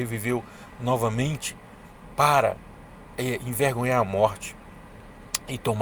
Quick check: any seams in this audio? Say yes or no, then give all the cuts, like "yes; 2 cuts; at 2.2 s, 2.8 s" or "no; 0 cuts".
no; 0 cuts